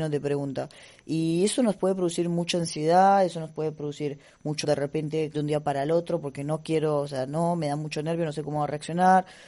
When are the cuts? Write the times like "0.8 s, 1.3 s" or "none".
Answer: 4.6 s, 5.3 s